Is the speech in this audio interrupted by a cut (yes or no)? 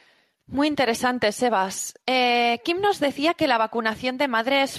yes